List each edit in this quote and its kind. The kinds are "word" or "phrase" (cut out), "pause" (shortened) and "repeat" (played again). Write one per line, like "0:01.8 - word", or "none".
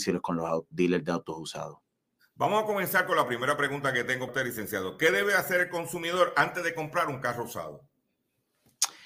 0:04.3 - word